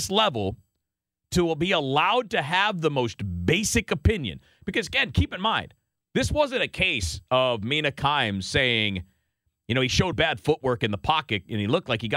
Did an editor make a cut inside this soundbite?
yes; 1 cut; at 10.1 s

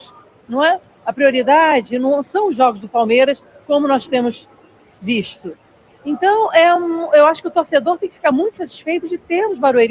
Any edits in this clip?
no; 0 cuts

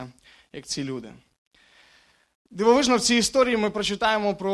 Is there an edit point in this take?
no; 0 cuts

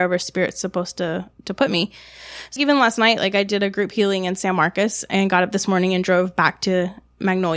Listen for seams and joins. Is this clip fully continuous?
no; 1 cut; at 2.6 s

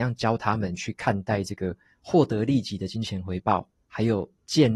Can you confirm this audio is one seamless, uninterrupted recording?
yes; 0 cuts

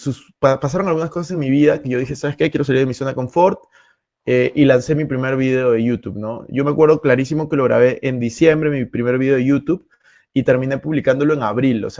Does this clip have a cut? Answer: no; 0 cuts

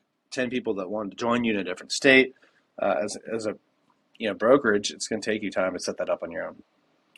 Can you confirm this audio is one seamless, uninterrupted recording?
yes; 0 cuts

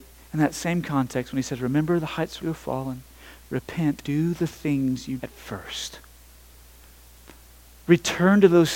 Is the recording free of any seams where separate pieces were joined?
no; 3 cuts; at 2.4 s, 4.0 s, 5.2 s

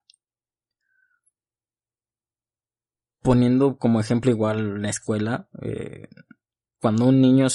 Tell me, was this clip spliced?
no; 0 cuts

